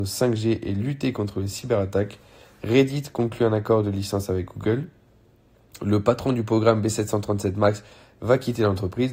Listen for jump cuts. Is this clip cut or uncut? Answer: uncut